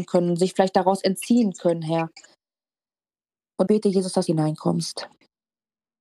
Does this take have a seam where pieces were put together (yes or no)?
yes